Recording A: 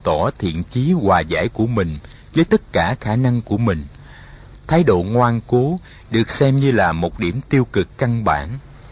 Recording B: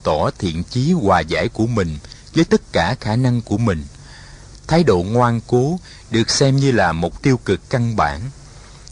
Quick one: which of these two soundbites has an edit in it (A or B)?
B